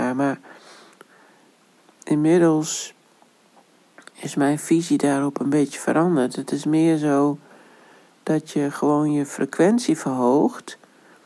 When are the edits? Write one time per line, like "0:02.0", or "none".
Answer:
none